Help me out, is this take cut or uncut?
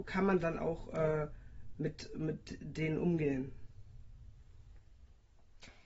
uncut